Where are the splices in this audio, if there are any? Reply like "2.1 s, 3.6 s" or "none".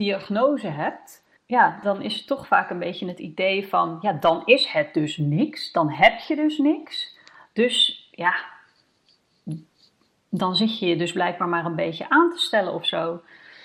1.4 s